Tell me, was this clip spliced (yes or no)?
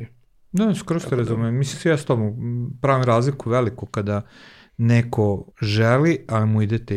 yes